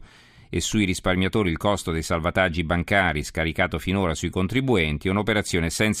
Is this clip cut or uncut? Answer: uncut